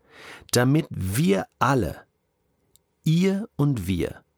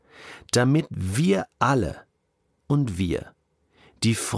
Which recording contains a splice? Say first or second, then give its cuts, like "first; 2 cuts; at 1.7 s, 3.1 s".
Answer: second; 1 cut; at 2.6 s